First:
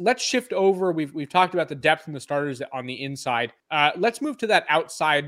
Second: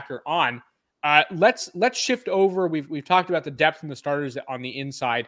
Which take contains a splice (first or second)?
first